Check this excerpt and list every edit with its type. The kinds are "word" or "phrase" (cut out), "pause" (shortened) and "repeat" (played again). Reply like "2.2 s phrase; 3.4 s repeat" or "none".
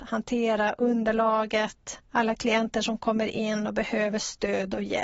2.0 s pause